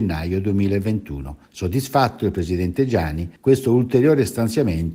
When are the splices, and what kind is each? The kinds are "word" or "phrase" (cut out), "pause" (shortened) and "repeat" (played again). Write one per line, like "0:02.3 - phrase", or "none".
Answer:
0:01.4 - pause
0:03.4 - pause